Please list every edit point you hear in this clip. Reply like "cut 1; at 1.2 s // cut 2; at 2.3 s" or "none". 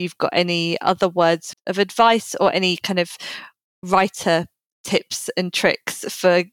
cut 1; at 1.5 s